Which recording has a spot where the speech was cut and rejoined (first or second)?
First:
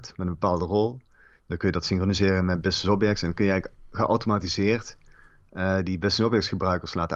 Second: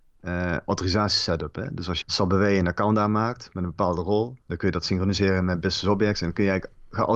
second